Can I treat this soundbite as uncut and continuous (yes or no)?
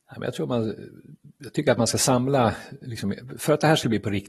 yes